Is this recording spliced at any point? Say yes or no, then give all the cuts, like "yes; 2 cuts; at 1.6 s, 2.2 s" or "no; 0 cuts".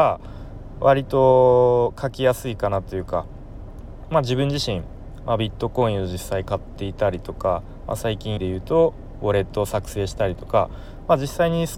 yes; 1 cut; at 8.4 s